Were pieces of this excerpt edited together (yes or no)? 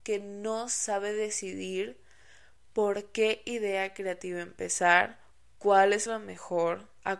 no